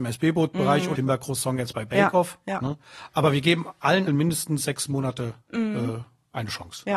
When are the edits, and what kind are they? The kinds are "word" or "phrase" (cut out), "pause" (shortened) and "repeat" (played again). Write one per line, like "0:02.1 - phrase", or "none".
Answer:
0:01.0 - word
0:04.1 - word
0:05.4 - pause